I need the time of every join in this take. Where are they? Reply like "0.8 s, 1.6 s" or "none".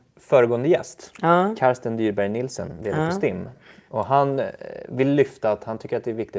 none